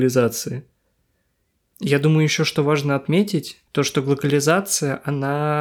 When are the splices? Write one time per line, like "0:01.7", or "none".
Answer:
0:03.7